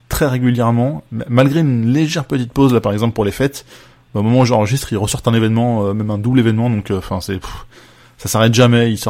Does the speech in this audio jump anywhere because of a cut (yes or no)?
no